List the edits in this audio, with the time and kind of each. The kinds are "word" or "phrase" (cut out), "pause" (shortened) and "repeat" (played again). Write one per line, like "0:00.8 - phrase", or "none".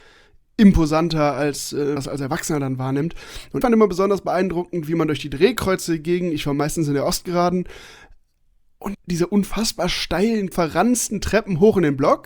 0:02.0 - word
0:03.6 - word
0:08.9 - word
0:10.5 - word